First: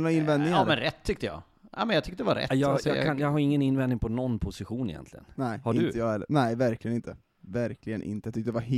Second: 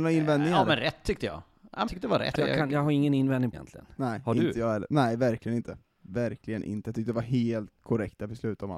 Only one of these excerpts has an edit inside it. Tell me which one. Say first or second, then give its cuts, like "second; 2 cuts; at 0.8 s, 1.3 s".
second; 4 cuts; at 1.9 s, 2.3 s, 3.5 s, 7.8 s